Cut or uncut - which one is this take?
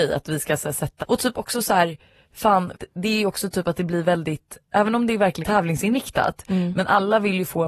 cut